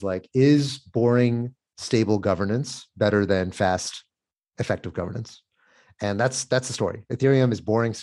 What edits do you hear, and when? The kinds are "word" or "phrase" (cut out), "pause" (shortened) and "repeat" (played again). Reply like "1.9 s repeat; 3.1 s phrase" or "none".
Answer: none